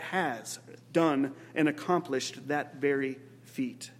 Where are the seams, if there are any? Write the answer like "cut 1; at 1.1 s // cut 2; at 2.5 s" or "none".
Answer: none